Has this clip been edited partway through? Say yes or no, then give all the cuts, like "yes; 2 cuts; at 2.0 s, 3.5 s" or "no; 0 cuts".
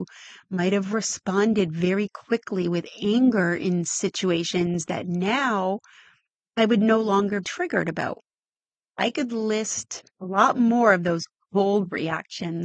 yes; 2 cuts; at 7.4 s, 10.1 s